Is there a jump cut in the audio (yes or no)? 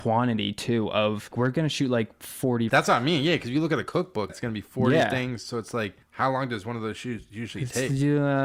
yes